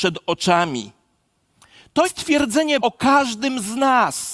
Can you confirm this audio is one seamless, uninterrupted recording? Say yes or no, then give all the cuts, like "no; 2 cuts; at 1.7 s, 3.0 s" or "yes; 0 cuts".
no; 2 cuts; at 2.0 s, 2.8 s